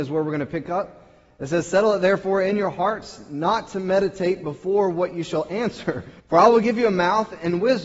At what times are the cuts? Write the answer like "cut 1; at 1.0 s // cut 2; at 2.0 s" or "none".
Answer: cut 1; at 6.2 s